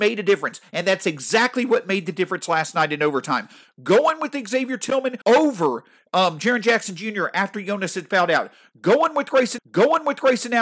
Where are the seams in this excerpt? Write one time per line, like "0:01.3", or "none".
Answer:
0:05.2
0:09.6